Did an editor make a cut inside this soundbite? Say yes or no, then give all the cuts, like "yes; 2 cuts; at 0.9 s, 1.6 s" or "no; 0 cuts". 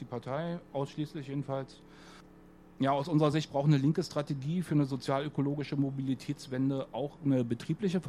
no; 0 cuts